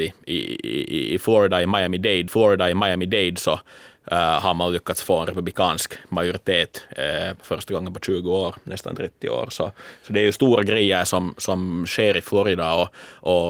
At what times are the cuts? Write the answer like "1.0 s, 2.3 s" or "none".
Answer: 2.3 s